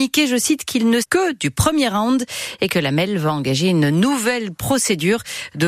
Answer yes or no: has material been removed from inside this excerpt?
yes